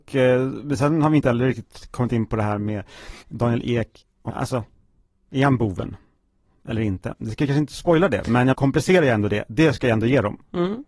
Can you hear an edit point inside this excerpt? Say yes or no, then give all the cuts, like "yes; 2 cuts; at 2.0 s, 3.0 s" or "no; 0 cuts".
yes; 4 cuts; at 3.2 s, 4.3 s, 5.0 s, 8.5 s